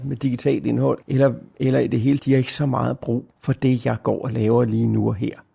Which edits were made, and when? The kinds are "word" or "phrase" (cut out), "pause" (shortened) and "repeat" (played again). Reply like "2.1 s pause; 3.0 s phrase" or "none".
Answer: 1.0 s pause; 2.2 s word; 3.3 s pause